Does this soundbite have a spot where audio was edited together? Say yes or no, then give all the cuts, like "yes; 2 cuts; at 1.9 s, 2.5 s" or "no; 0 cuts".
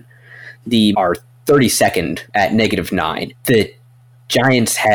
yes; 2 cuts; at 0.9 s, 2.3 s